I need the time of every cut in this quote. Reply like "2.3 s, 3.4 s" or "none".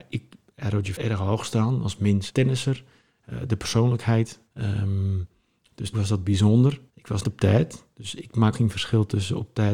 1.0 s, 2.3 s, 4.5 s, 5.9 s, 6.9 s, 7.2 s, 8.5 s